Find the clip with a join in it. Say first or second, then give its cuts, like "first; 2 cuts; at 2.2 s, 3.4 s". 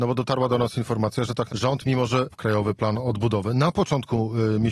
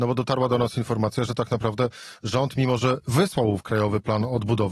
first; 2 cuts; at 1.5 s, 2.3 s